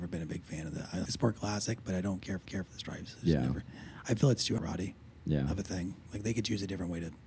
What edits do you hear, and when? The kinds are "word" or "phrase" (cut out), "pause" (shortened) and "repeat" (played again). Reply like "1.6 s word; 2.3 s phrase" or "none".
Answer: 1.1 s word; 2.5 s repeat; 4.6 s word